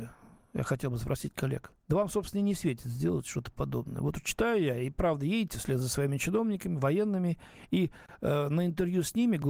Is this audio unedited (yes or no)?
no